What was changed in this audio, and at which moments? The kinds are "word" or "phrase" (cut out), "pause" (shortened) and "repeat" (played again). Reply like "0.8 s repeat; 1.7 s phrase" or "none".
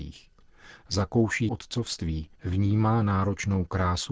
1.5 s word; 2.4 s pause